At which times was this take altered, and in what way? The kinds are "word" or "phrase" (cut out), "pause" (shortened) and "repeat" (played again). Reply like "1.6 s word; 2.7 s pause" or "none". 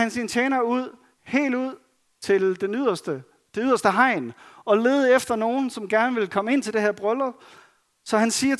none

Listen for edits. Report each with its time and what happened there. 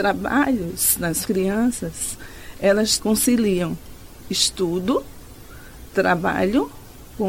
1.3 s phrase; 3.0 s word

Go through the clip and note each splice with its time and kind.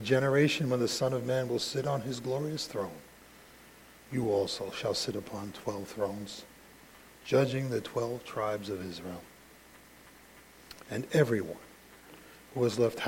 none

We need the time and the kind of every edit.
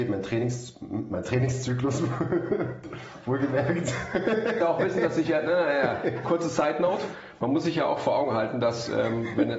4.6 s phrase; 6.2 s phrase

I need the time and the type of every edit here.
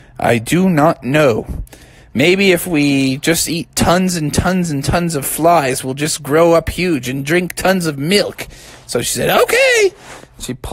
none

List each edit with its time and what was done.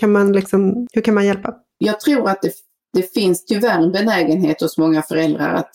none

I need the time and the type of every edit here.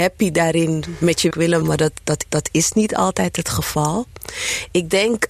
1.3 s word; 1.6 s word; 2.2 s repeat

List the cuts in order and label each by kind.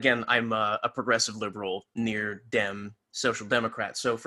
1.9 s pause; 3.0 s pause

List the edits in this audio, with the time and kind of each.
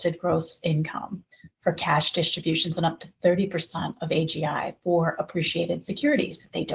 none

